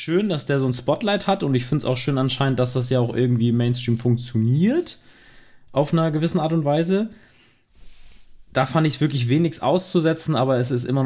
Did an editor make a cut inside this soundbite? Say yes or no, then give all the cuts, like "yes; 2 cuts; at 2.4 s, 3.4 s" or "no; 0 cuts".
no; 0 cuts